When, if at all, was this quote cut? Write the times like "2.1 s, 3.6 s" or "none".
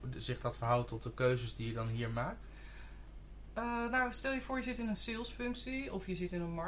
none

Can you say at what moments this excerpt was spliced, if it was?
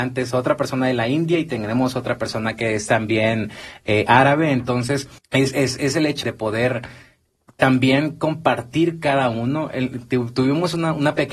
5.2 s, 6.2 s

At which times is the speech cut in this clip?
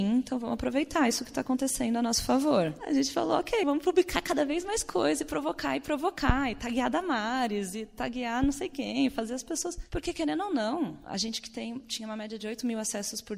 3.6 s

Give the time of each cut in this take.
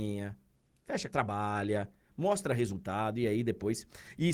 1.1 s

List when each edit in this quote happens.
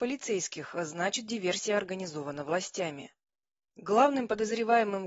none

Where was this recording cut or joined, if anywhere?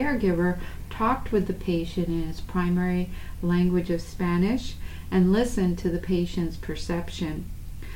none

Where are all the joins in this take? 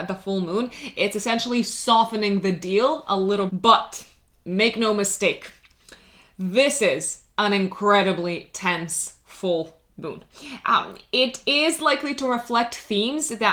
3.5 s

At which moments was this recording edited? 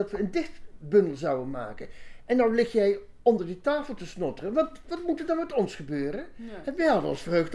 none

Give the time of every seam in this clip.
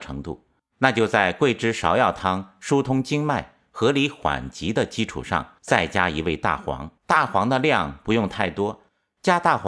5.6 s, 7.0 s

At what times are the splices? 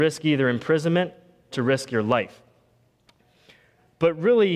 1.5 s

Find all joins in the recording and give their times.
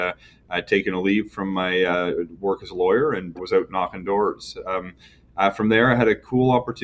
3.4 s

